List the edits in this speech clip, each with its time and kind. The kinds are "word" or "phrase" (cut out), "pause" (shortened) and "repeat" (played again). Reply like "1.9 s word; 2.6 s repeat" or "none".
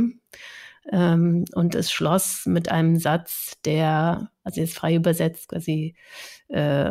none